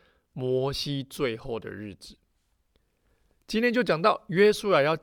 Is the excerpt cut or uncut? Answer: uncut